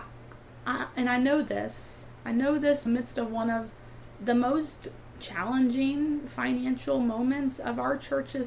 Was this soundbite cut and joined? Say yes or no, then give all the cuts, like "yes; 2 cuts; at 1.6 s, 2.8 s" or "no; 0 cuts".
yes; 1 cut; at 2.9 s